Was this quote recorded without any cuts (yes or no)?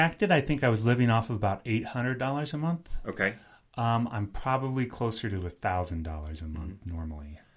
yes